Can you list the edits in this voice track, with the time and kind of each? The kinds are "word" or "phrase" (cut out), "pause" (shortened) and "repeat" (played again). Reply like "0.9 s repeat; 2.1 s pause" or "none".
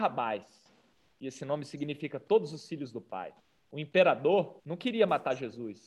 3.4 s pause; 4.6 s pause